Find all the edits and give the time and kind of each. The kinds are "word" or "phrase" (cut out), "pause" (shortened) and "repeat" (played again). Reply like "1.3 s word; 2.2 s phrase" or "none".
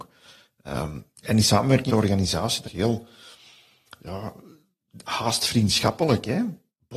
1.9 s word; 2.6 s word